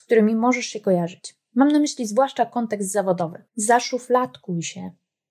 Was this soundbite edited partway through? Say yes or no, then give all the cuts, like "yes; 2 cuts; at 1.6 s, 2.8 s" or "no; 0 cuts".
yes; 1 cut; at 3.5 s